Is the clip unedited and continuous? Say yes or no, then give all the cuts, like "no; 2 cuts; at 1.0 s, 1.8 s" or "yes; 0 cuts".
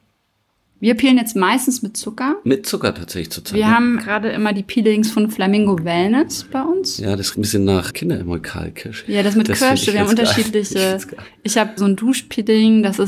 no; 4 cuts; at 4.0 s, 7.3 s, 7.9 s, 11.8 s